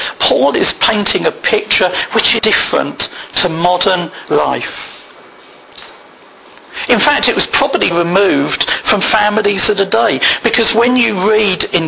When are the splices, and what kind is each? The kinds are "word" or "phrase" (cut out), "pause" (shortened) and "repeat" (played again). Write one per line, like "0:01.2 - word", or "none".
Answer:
0:02.4 - word
0:04.3 - word
0:07.9 - phrase

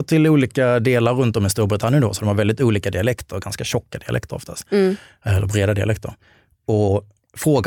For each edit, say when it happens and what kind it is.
none

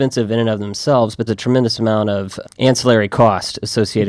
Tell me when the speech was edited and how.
0:01.3 - word
0:02.4 - word

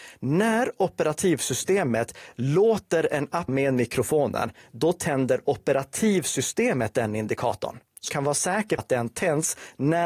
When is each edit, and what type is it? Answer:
0:03.5 - word
0:08.1 - word
0:08.8 - word

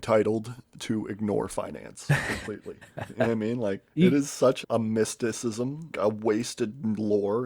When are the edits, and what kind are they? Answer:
0:03.9 - pause
0:04.6 - word
0:05.9 - word

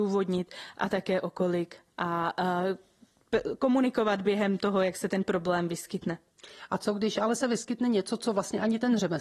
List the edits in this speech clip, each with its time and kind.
none

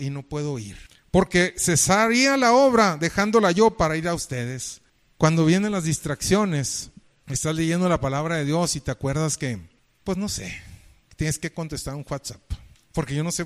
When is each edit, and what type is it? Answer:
none

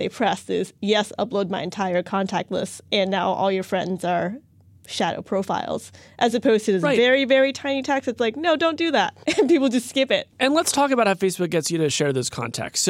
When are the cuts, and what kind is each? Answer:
none

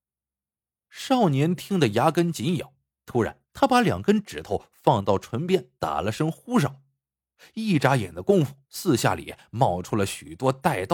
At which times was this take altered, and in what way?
0:02.9 - pause
0:03.5 - pause
0:05.7 - pause
0:08.6 - pause

